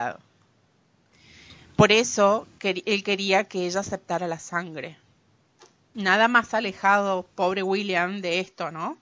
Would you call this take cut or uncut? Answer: uncut